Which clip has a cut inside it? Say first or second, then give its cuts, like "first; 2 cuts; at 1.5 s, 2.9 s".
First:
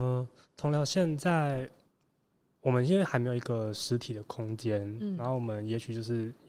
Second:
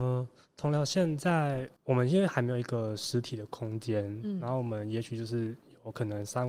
second; 1 cut; at 1.8 s